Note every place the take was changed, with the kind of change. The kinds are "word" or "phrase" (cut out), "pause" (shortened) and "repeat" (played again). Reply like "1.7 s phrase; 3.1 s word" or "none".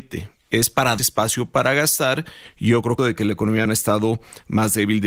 1.0 s phrase; 3.0 s phrase; 3.7 s word